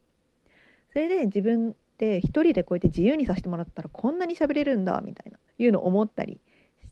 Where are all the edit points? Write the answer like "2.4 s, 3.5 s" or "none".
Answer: 5.5 s